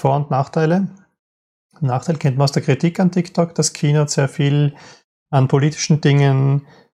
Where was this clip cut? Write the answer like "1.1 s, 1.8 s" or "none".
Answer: none